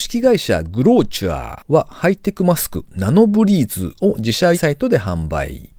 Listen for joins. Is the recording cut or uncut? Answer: cut